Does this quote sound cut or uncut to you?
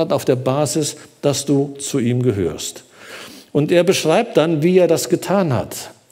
uncut